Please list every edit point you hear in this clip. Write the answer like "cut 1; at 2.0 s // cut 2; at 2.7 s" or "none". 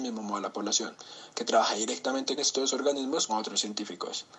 cut 1; at 2.4 s // cut 2; at 3.3 s